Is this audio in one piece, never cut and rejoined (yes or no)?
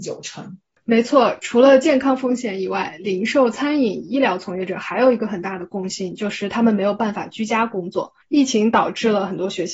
no